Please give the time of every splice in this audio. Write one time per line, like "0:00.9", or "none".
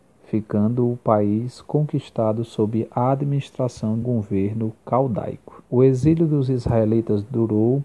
0:04.0
0:05.7